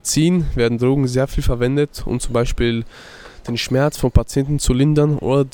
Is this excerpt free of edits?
yes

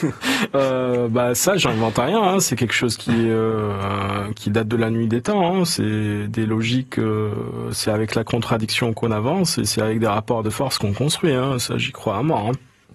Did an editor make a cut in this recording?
no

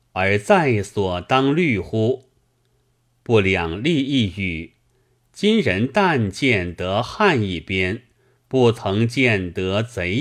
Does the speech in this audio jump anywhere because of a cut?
no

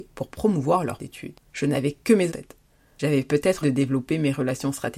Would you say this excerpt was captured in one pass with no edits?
no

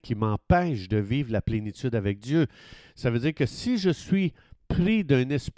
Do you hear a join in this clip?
no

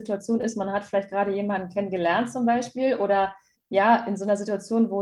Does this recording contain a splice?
no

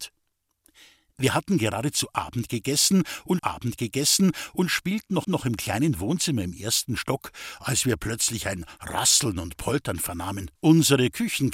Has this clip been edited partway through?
yes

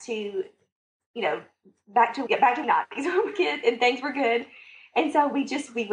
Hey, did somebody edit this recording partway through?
yes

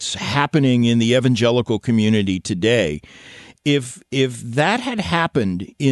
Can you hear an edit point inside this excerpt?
no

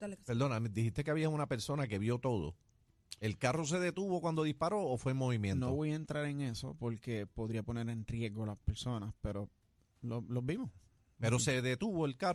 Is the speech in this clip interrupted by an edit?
no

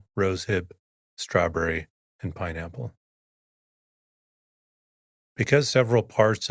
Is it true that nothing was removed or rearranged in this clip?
yes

